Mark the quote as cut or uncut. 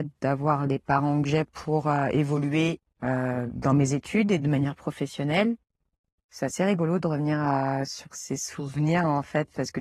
cut